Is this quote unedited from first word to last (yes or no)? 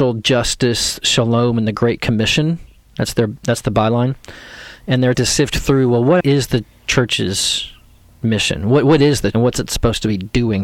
no